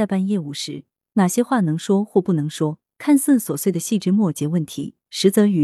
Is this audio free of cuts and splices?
yes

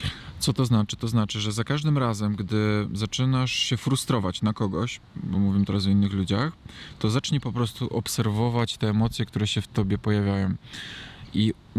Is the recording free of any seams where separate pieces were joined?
yes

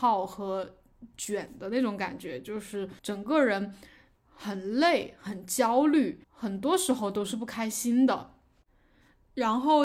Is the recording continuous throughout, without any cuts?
no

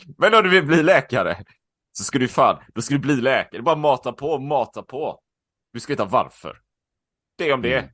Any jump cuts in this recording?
no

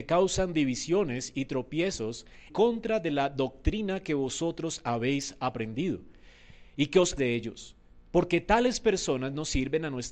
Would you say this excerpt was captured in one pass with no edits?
no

